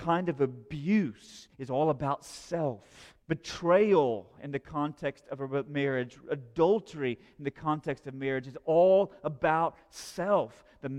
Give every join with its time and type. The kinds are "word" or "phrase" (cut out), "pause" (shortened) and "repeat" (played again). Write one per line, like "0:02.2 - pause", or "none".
0:01.5 - pause
0:03.2 - pause